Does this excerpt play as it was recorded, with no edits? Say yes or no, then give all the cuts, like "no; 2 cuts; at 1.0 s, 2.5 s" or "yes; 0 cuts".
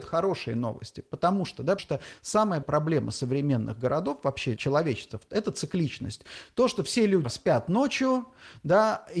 no; 4 cuts; at 1.8 s, 2.6 s, 4.6 s, 7.2 s